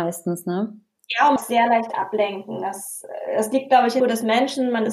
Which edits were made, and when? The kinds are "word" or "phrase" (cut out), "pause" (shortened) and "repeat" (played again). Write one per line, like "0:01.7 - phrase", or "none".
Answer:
0:01.4 - phrase
0:04.0 - phrase